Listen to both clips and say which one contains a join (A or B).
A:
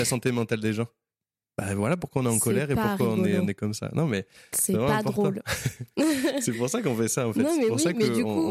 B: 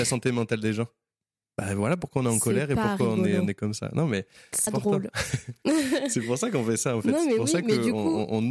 B